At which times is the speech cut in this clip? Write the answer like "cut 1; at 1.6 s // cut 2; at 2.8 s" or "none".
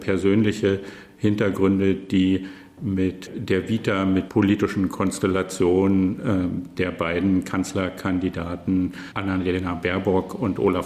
cut 1; at 4.3 s